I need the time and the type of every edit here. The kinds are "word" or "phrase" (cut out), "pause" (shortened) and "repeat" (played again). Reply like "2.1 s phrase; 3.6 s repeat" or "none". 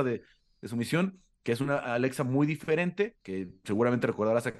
3.2 s pause